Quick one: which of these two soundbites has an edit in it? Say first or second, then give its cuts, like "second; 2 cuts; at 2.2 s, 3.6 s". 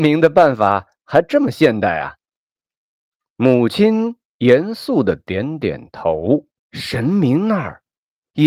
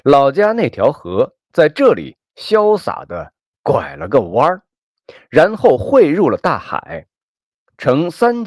first; 1 cut; at 6.6 s